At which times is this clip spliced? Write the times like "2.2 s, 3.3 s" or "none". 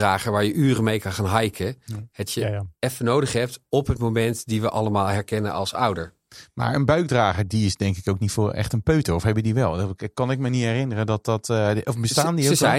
2.3 s, 2.7 s